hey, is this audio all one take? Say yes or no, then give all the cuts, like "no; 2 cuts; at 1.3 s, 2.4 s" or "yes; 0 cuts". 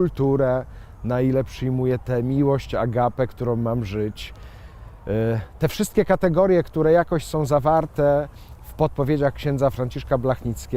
yes; 0 cuts